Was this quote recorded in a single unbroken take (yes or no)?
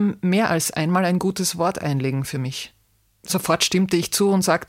yes